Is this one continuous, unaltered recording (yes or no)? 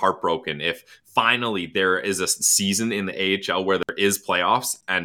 yes